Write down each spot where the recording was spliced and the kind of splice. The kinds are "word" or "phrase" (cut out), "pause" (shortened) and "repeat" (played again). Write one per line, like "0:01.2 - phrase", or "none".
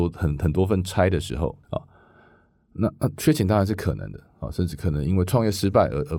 0:01.6 - pause